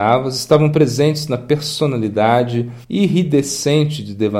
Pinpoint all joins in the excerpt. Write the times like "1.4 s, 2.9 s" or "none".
2.8 s